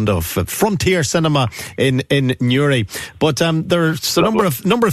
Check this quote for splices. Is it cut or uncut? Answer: uncut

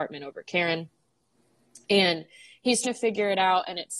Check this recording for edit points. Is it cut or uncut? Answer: cut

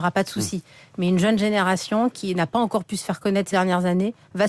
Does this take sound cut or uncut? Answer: cut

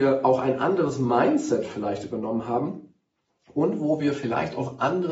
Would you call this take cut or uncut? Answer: uncut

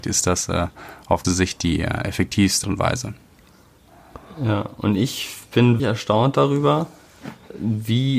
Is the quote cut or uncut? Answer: cut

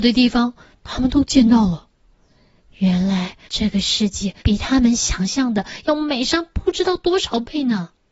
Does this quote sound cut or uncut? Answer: cut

